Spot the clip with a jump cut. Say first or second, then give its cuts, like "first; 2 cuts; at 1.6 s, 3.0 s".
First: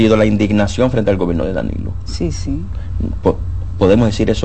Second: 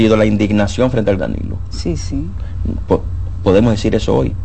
second; 1 cut; at 1.2 s